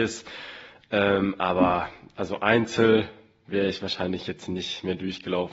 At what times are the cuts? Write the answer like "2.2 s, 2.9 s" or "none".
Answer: none